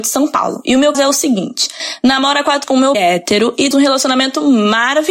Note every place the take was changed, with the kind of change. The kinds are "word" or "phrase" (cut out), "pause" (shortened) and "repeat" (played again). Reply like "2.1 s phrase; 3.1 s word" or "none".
0.9 s word; 2.6 s word; 2.9 s word; 3.7 s word